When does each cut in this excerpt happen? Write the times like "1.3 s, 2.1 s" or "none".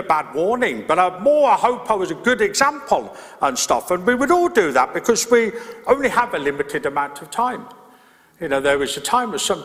none